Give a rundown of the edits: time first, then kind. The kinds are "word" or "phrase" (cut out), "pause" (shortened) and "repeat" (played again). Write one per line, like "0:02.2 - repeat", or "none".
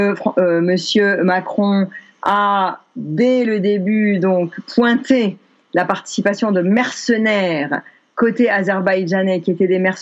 none